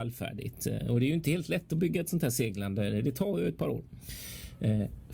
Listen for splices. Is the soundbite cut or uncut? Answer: uncut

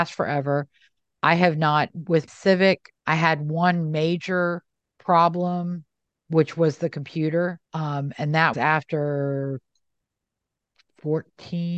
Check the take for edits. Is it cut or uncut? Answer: cut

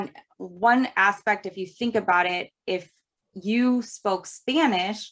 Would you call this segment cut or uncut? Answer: uncut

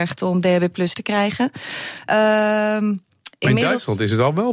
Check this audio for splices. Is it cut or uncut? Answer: cut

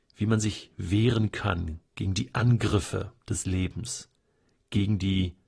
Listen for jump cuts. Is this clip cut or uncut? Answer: cut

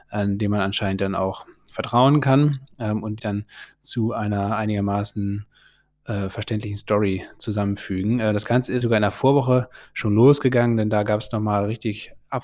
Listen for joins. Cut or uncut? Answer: cut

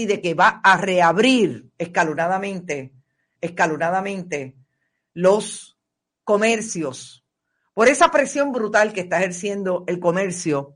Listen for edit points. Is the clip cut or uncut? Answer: cut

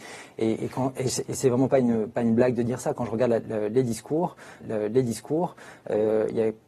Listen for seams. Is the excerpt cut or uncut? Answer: cut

